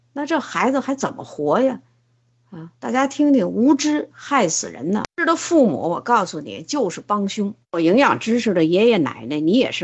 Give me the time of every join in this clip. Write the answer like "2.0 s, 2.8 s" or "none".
7.6 s